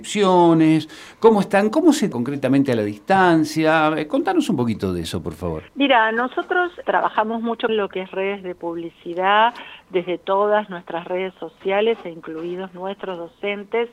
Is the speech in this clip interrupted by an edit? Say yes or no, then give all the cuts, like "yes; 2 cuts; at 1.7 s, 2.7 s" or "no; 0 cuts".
yes; 4 cuts; at 2.1 s, 5.7 s, 6.8 s, 7.7 s